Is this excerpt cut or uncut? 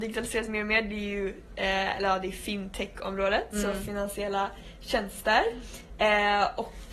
uncut